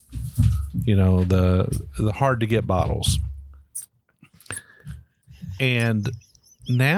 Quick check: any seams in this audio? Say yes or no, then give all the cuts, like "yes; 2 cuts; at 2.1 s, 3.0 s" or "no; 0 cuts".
no; 0 cuts